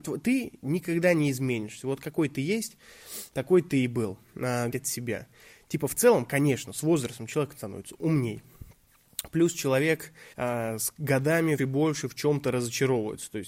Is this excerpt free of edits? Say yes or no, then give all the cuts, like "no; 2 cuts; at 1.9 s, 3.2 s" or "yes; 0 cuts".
no; 3 cuts; at 4.7 s, 10.3 s, 11.6 s